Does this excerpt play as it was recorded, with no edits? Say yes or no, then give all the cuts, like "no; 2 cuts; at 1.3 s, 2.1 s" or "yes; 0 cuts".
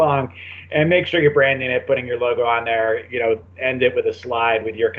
yes; 0 cuts